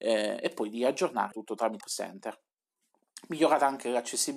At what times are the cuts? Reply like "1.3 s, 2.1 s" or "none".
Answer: 1.3 s, 1.8 s